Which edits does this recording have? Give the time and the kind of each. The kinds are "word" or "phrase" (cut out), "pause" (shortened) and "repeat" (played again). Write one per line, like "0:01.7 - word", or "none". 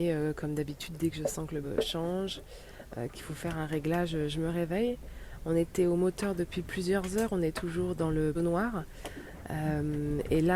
0:01.6 - word
0:08.3 - word